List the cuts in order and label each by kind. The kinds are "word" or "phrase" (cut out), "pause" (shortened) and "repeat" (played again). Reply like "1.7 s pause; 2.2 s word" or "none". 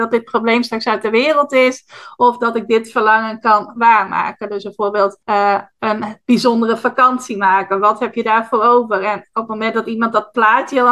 5.2 s pause